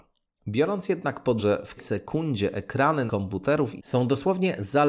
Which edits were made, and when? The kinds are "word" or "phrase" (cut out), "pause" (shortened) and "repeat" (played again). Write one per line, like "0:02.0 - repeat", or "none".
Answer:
0:01.4 - word
0:01.8 - word
0:03.1 - word
0:03.8 - word